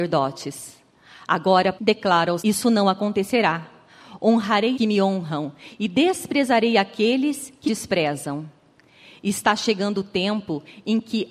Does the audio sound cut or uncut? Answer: cut